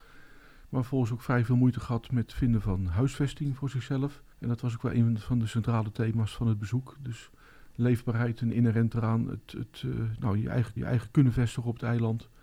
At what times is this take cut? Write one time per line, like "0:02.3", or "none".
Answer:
0:04.3
0:10.8